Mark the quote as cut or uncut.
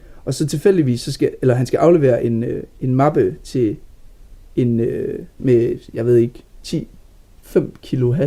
uncut